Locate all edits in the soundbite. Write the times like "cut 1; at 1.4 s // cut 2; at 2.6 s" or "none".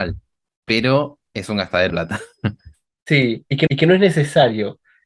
cut 1; at 1.3 s // cut 2; at 1.9 s // cut 3; at 3.7 s